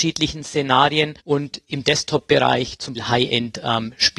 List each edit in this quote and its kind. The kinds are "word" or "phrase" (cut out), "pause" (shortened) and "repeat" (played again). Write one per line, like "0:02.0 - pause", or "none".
0:01.2 - pause
0:02.9 - word